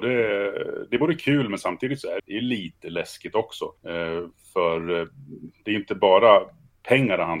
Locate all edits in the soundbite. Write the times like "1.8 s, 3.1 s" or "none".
2.2 s, 3.8 s